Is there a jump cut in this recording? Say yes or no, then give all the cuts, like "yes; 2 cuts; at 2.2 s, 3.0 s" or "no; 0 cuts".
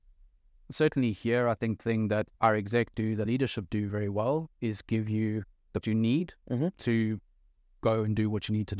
yes; 5 cuts; at 1.8 s, 2.3 s, 3.2 s, 3.9 s, 5.8 s